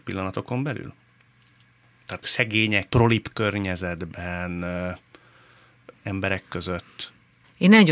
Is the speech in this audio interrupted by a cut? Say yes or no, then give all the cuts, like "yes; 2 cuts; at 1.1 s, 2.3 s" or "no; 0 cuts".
yes; 3 cuts; at 2.2 s, 2.9 s, 5.9 s